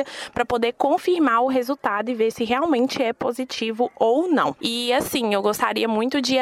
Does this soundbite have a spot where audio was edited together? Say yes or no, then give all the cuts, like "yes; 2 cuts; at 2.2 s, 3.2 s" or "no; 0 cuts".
no; 0 cuts